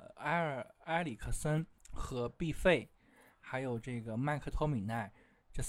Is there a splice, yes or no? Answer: yes